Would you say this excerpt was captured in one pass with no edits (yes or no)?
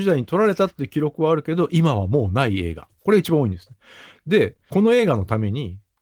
yes